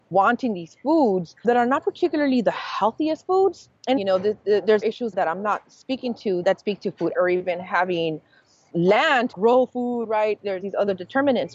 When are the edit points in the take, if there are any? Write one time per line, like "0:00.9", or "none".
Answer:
0:04.0
0:04.8
0:05.1
0:06.4
0:07.1
0:09.3
0:10.6

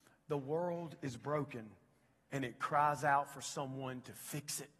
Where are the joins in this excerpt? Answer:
none

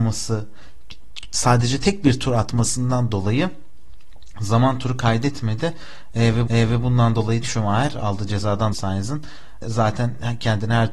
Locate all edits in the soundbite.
0:06.5
0:07.4
0:08.7
0:09.6

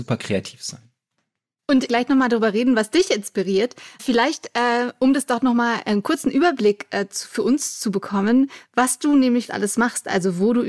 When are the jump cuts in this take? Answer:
0:01.9
0:04.0
0:09.5

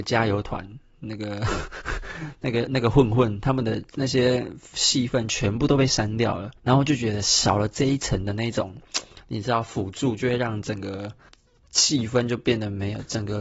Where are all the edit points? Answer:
0:03.9
0:06.6
0:11.3

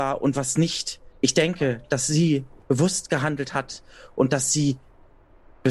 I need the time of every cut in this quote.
0:01.1

